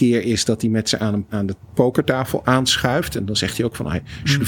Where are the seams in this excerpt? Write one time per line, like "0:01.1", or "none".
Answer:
0:01.3
0:01.6